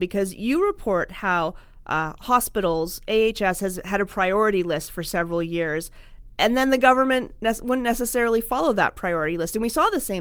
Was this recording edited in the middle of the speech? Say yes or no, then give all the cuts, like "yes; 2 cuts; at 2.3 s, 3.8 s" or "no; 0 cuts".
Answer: no; 0 cuts